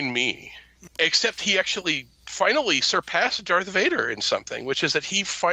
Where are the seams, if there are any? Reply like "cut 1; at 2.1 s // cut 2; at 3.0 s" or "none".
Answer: none

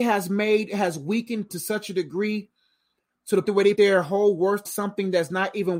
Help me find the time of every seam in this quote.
cut 1; at 1.5 s // cut 2; at 3.4 s // cut 3; at 3.7 s // cut 4; at 4.6 s

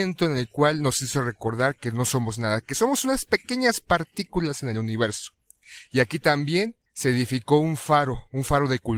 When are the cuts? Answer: cut 1; at 6.9 s

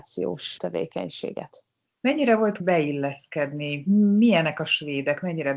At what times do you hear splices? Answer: cut 1; at 2.6 s

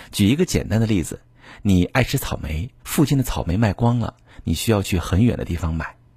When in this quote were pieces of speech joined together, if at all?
cut 1; at 2.8 s

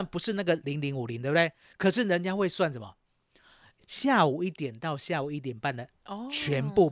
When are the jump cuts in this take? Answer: none

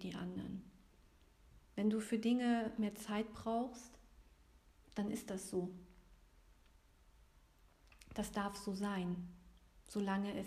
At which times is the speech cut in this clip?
cut 1; at 1.6 s // cut 2; at 2.8 s // cut 3; at 4.7 s

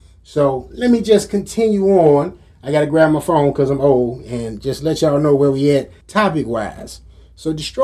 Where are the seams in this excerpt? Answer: cut 1; at 6.0 s

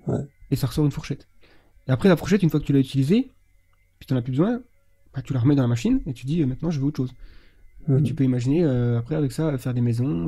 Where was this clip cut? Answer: none

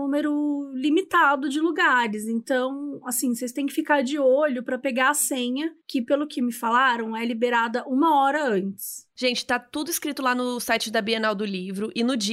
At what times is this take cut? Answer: cut 1; at 5.8 s

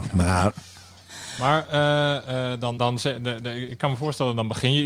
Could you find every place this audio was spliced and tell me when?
cut 1; at 2.8 s

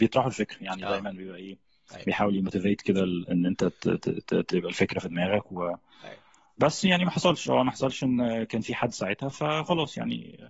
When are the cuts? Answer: none

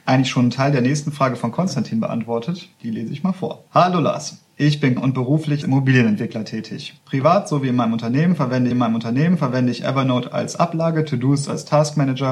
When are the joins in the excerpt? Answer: cut 1; at 2.7 s // cut 2; at 3.7 s // cut 3; at 5.0 s // cut 4; at 5.6 s // cut 5; at 7.0 s // cut 6; at 8.7 s

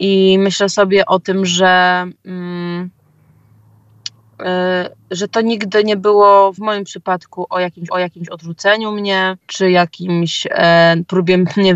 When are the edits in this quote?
cut 1; at 6.6 s // cut 2; at 7.9 s // cut 3; at 9.4 s

